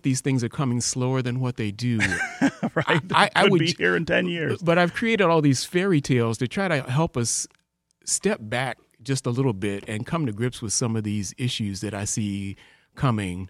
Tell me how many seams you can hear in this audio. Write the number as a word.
zero